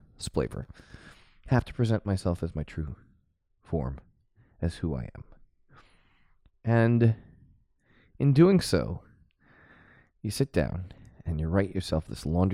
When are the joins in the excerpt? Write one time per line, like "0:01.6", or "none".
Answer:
none